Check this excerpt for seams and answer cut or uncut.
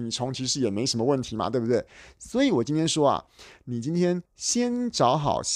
cut